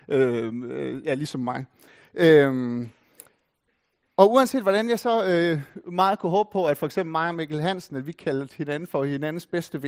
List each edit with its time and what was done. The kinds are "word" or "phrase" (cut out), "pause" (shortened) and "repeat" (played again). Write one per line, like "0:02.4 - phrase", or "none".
none